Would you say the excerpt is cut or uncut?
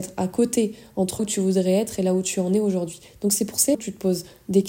cut